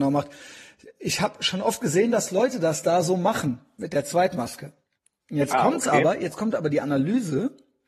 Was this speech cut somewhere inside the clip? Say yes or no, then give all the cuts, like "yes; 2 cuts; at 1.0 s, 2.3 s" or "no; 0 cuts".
no; 0 cuts